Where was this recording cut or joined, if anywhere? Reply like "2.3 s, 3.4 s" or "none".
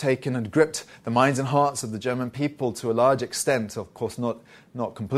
none